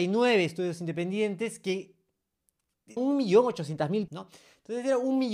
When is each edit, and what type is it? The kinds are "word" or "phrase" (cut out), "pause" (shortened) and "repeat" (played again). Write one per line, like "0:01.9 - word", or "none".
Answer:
0:03.0 - word
0:04.1 - word